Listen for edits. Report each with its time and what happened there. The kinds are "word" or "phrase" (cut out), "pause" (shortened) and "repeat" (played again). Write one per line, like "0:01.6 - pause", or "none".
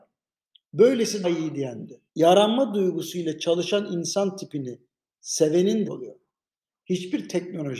0:01.2 - word
0:02.1 - pause
0:05.8 - phrase